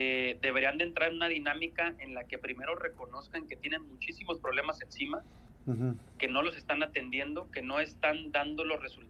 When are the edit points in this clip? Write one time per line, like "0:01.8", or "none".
none